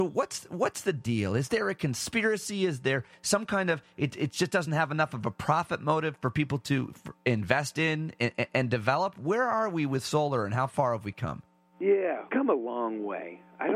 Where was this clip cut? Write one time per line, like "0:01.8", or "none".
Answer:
0:12.3